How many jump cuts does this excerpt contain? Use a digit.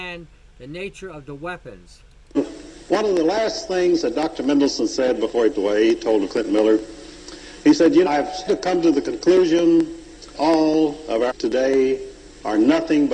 6